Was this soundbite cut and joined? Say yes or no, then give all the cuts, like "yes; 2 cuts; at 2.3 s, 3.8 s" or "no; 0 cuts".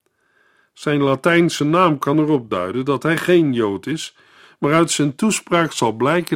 no; 0 cuts